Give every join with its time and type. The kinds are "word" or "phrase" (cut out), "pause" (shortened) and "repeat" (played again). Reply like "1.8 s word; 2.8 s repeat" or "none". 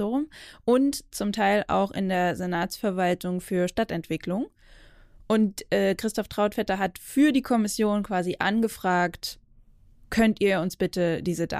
none

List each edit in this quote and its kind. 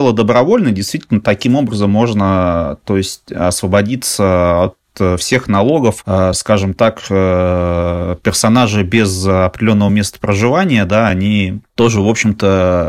none

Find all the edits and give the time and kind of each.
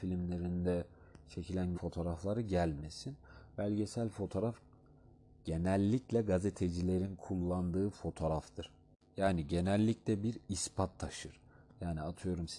1.7 s word

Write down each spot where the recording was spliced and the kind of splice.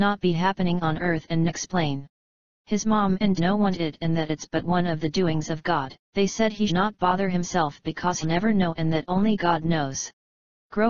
1.5 s phrase; 3.4 s phrase; 3.7 s phrase; 6.0 s pause; 6.7 s word; 8.2 s phrase

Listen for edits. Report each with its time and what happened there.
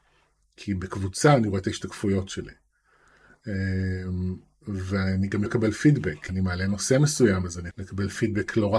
5.5 s word; 6.3 s word; 7.7 s word

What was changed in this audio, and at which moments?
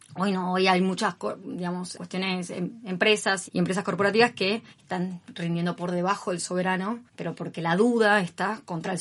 1.9 s word; 3.5 s word; 4.7 s pause; 7.1 s pause

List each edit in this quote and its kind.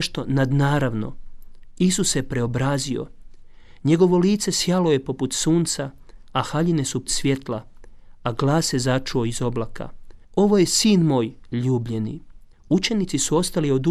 7.1 s phrase; 10.2 s pause; 12.5 s pause

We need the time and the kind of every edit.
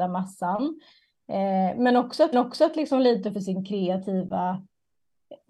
2.3 s repeat; 3.3 s phrase

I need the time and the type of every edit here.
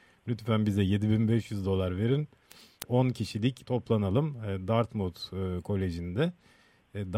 2.9 s phrase; 3.6 s phrase

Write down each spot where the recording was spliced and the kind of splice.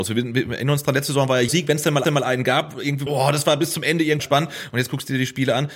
1.5 s word; 2.0 s repeat; 3.1 s word; 4.2 s word

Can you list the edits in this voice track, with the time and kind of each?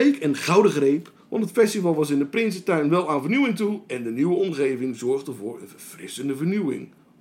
none

